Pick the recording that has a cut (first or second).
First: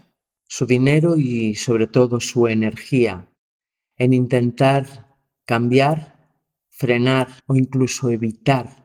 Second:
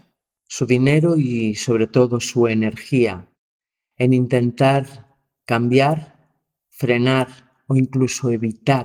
first